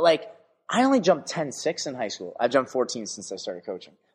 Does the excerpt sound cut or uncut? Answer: uncut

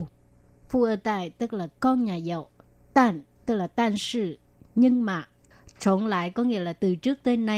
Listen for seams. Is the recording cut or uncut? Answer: uncut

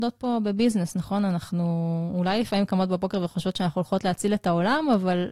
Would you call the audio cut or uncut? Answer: uncut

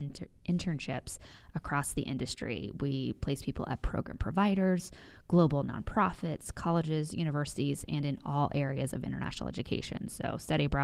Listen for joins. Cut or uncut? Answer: uncut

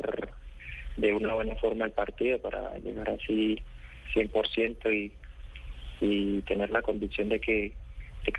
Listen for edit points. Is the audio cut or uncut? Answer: uncut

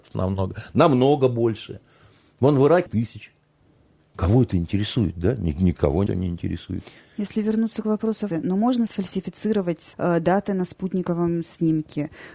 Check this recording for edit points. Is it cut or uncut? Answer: cut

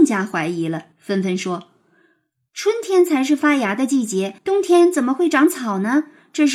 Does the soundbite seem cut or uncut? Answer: cut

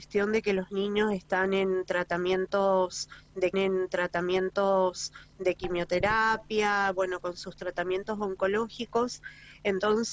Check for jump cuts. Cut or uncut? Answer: cut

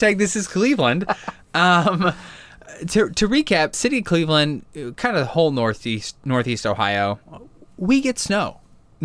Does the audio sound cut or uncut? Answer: cut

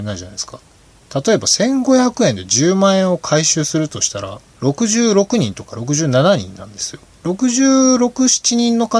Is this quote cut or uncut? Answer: cut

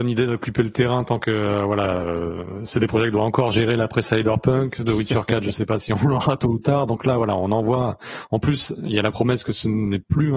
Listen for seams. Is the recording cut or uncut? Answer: uncut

